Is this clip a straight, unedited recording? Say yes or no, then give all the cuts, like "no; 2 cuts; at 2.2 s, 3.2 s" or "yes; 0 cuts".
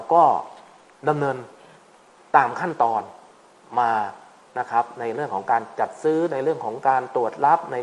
yes; 0 cuts